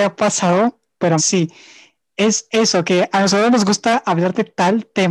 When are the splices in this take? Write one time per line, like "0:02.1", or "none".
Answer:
0:01.2